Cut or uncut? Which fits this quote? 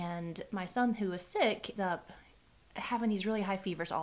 cut